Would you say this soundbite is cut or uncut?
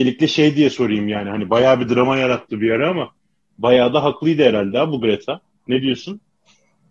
uncut